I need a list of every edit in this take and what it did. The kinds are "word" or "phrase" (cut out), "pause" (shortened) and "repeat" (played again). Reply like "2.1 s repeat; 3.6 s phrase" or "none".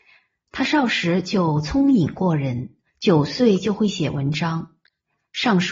2.9 s pause